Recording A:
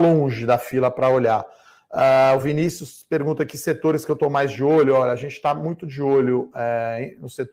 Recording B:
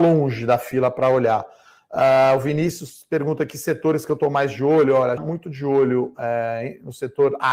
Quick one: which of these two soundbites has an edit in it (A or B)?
B